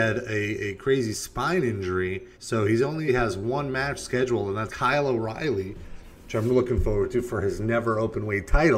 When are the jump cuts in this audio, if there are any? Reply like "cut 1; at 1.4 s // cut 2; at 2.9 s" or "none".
cut 1; at 2.3 s // cut 2; at 3.1 s // cut 3; at 4.7 s